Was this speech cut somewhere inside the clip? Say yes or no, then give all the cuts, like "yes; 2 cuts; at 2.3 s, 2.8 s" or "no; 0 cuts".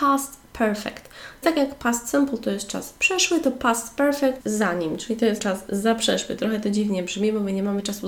yes; 3 cuts; at 1.4 s, 4.4 s, 5.4 s